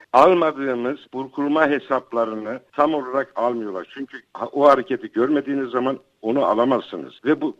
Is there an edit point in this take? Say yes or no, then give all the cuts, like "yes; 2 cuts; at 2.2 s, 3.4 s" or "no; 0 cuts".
yes; 1 cut; at 1.0 s